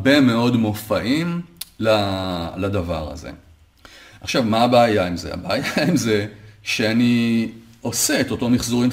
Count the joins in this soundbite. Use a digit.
0